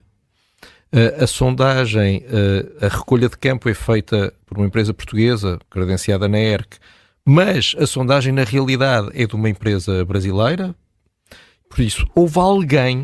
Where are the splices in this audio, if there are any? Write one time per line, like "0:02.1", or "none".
0:04.4
0:05.6